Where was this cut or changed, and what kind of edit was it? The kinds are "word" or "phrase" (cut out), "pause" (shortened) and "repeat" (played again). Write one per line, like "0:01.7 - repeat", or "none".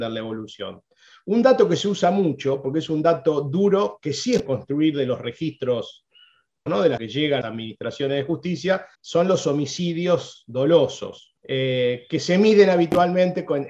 0:04.5 - word
0:06.7 - word
0:07.0 - phrase
0:07.4 - word
0:08.9 - pause
0:11.4 - pause